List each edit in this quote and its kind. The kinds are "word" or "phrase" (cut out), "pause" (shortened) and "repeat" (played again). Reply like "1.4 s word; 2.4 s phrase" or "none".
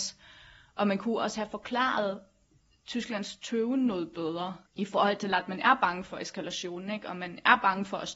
none